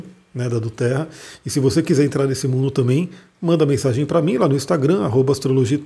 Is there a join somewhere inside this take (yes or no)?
no